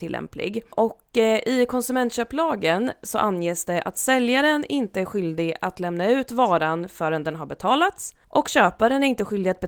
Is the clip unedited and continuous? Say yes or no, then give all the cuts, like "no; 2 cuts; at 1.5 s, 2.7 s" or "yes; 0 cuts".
no; 1 cut; at 8.2 s